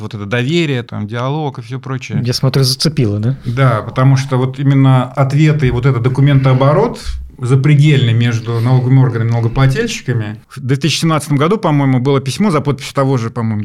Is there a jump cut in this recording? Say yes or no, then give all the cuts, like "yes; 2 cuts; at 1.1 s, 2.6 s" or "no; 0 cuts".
no; 0 cuts